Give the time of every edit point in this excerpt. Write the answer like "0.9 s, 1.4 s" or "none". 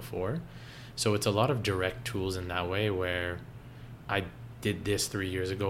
none